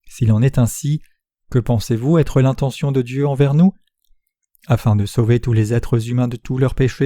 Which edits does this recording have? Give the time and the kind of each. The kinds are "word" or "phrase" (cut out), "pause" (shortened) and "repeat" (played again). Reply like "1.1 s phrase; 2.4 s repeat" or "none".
none